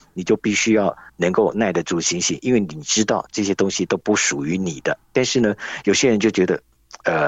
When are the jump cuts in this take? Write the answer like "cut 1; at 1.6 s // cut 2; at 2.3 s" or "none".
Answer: cut 1; at 1.1 s // cut 2; at 5.0 s